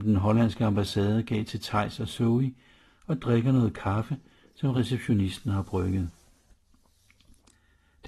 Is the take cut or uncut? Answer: uncut